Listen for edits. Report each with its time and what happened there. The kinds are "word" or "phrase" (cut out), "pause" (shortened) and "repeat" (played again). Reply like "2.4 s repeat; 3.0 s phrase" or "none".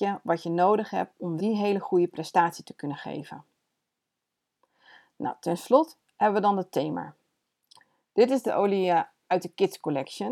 1.4 s word; 8.5 s word